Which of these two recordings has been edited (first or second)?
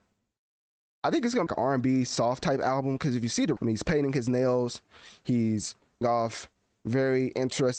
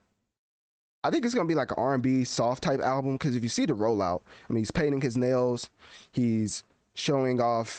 first